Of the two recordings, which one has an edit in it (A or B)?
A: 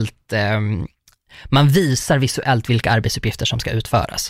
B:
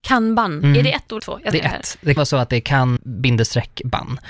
B